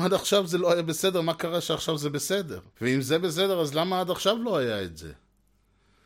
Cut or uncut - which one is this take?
cut